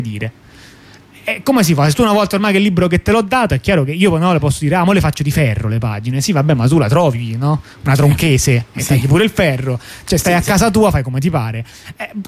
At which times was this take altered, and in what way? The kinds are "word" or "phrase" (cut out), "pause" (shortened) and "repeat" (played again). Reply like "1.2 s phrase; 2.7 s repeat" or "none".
none